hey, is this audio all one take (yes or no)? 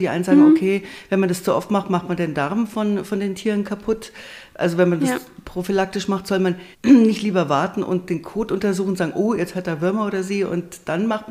no